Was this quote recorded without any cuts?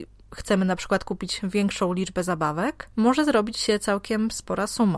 no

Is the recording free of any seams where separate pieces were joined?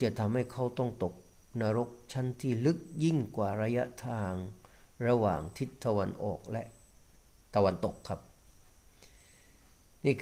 yes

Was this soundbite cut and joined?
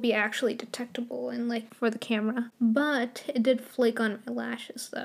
no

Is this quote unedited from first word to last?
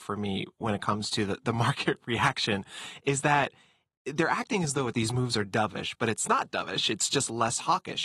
yes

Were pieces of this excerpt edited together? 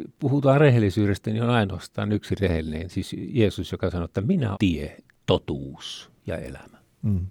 yes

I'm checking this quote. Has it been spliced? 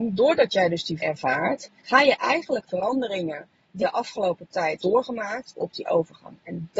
yes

